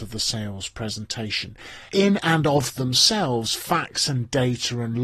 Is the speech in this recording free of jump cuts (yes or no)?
no